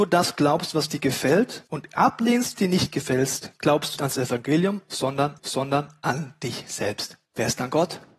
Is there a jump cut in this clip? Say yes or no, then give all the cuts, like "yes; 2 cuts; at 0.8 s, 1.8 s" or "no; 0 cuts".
yes; 5 cuts; at 1.7 s, 2.6 s, 4.0 s, 5.4 s, 7.3 s